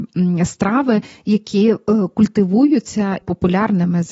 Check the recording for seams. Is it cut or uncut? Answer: cut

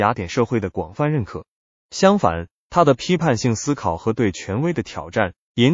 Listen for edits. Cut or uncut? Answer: uncut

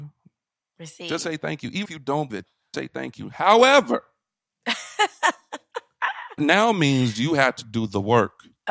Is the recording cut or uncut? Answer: cut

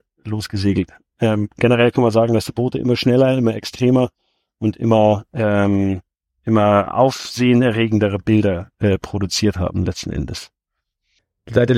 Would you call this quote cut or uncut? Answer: uncut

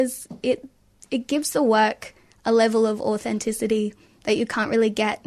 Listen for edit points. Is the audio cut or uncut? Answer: uncut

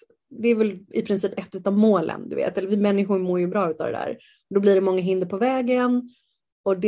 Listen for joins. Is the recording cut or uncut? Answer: uncut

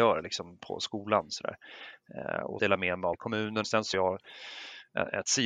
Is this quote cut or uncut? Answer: cut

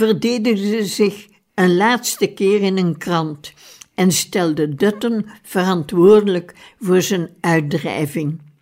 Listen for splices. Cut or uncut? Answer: uncut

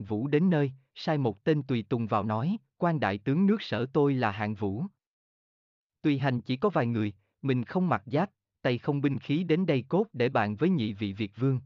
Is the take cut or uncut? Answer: uncut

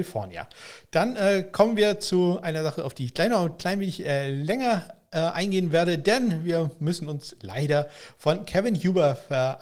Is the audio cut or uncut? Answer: uncut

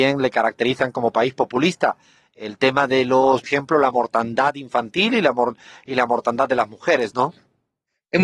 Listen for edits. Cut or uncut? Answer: cut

